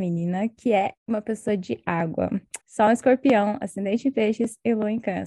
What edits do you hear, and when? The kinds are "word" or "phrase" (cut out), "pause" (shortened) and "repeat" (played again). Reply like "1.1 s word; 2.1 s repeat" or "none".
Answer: 1.0 s pause; 2.6 s pause